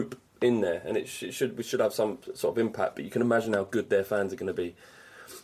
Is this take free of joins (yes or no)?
yes